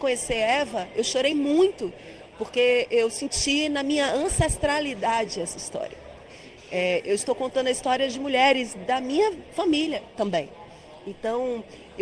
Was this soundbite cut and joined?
no; 0 cuts

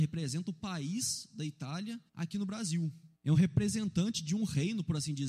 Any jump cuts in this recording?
yes; 2 cuts; at 2.1 s, 3.2 s

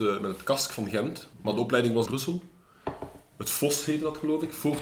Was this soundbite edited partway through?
yes; 2 cuts; at 1.3 s, 2.1 s

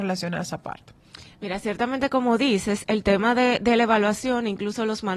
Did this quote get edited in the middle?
no; 0 cuts

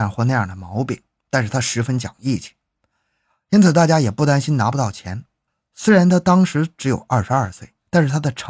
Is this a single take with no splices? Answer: yes; 0 cuts

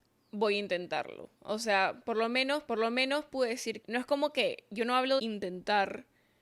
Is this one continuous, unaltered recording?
no; 4 cuts; at 1.3 s, 2.7 s, 3.8 s, 5.2 s

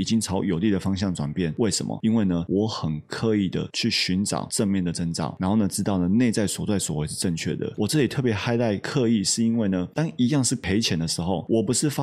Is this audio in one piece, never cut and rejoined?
yes; 0 cuts

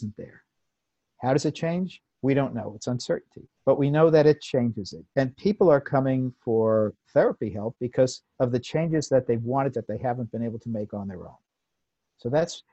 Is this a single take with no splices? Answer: no; 6 cuts; at 2.1 s, 3.6 s, 5.1 s, 7.0 s, 8.3 s, 9.7 s

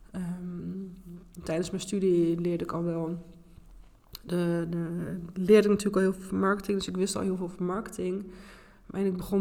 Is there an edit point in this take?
no; 0 cuts

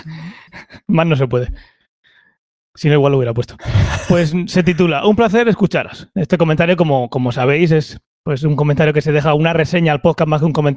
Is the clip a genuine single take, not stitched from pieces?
yes; 0 cuts

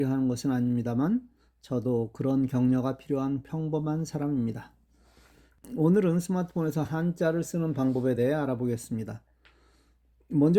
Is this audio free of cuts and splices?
yes; 0 cuts

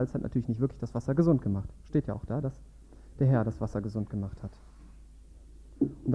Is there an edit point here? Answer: no; 0 cuts

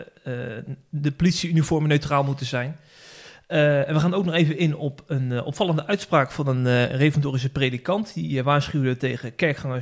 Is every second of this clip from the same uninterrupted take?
yes; 0 cuts

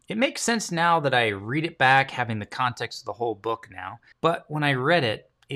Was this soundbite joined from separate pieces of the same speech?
yes; 1 cut; at 4.1 s

